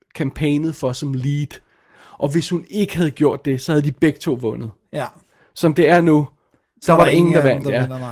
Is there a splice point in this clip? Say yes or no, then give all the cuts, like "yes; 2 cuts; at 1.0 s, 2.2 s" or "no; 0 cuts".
no; 0 cuts